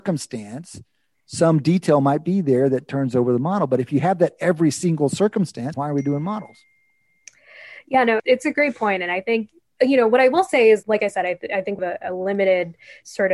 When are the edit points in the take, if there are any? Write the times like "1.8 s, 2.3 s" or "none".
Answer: 5.7 s, 8.2 s, 10.8 s, 11.8 s

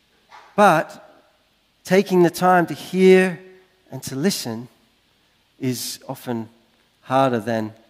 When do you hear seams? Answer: none

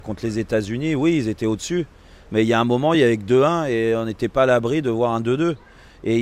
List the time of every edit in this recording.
none

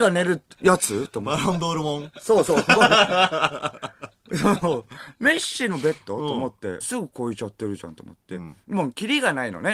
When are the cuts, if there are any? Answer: 6.8 s

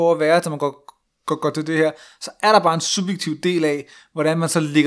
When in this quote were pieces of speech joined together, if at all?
none

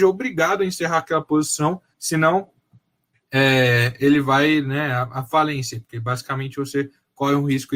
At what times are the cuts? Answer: 1.9 s

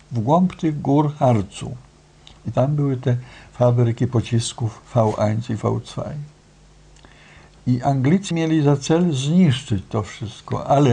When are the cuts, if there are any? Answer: 4.8 s, 8.3 s

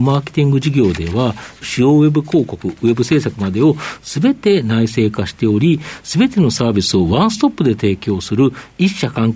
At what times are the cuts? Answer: 1.6 s

